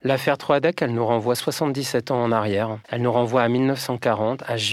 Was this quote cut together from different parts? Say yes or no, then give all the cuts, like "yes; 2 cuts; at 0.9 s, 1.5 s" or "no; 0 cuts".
yes; 1 cut; at 2.8 s